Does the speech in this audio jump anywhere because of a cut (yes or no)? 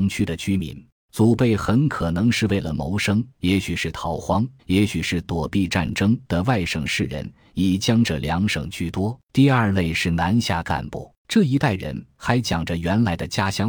yes